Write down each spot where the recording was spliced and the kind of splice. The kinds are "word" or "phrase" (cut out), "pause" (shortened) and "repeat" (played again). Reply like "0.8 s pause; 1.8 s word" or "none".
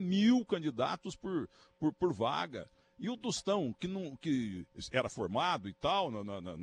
none